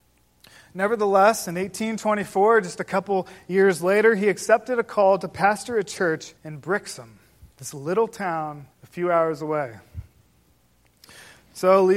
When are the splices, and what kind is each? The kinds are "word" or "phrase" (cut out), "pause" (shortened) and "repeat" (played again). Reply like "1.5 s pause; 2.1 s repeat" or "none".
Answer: 6.4 s pause; 7.5 s pause; 8.7 s pause